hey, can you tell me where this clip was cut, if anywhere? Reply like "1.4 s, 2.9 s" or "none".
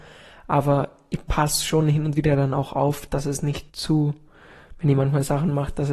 3.7 s